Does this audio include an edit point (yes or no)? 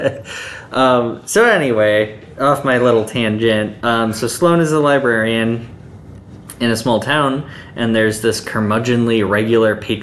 no